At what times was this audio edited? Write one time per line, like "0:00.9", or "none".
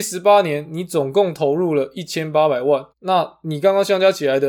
0:02.9